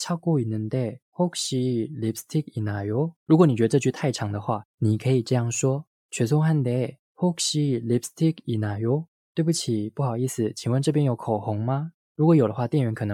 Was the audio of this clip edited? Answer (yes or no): yes